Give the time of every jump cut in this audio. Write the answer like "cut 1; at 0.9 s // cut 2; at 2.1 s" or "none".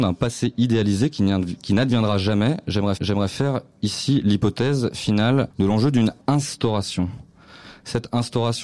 cut 1; at 3.0 s // cut 2; at 5.5 s // cut 3; at 6.2 s